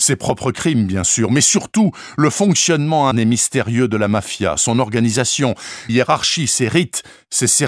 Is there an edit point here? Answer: yes; 2 cuts; at 3.1 s, 5.9 s

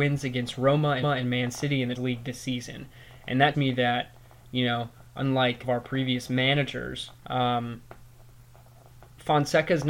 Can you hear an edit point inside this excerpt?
yes; 5 cuts; at 1.0 s, 2.0 s, 3.5 s, 5.6 s, 7.2 s

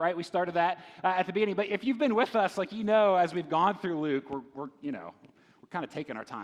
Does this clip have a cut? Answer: no; 0 cuts

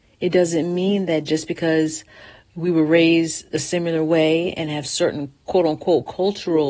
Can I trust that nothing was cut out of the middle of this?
yes; 0 cuts

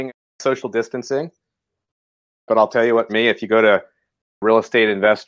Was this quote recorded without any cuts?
no; 1 cut; at 3.1 s

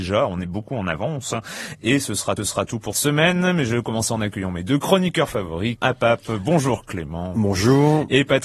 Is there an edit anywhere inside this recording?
yes; 3 cuts; at 2.4 s, 2.9 s, 5.8 s

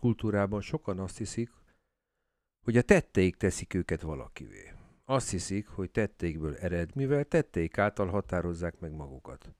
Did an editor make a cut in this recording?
yes; 1 cut; at 6.9 s

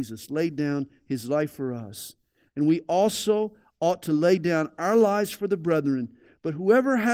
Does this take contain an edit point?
no; 0 cuts

